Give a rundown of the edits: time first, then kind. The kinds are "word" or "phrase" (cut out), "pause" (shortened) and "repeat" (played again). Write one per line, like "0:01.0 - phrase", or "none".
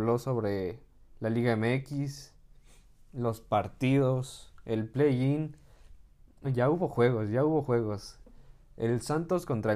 0:06.4 - word